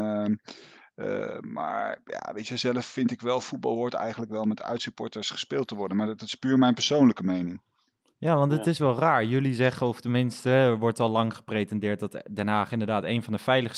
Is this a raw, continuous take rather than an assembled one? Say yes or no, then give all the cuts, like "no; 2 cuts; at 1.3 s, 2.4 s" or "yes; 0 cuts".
yes; 0 cuts